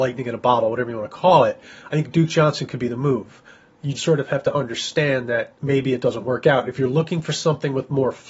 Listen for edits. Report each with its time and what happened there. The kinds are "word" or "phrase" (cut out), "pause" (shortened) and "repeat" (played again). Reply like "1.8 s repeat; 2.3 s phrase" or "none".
4.0 s word; 5.6 s pause